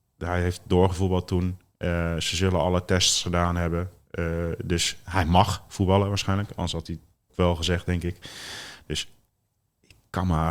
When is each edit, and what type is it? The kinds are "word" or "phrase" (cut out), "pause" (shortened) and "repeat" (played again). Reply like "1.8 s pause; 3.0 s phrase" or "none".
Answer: 7.3 s phrase